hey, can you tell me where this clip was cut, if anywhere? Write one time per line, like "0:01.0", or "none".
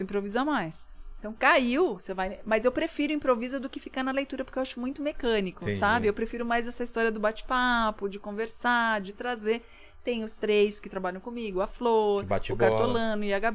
none